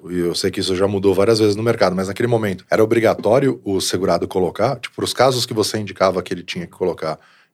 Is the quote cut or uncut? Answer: uncut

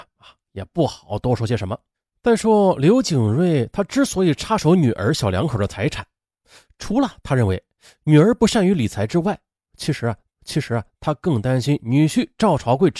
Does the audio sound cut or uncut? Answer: cut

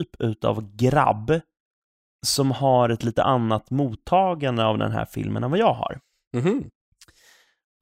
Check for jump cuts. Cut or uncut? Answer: uncut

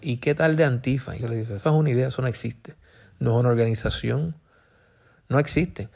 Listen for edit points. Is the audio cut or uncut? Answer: cut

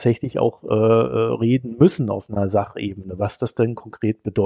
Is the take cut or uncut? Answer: uncut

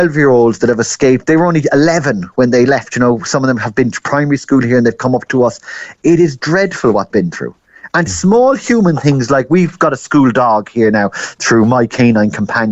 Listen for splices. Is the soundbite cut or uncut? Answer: cut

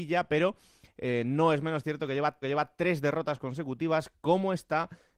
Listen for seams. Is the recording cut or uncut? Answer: cut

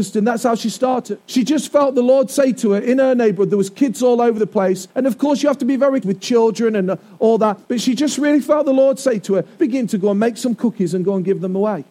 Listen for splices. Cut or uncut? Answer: cut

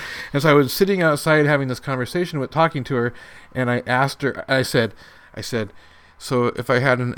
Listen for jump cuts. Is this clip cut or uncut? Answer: uncut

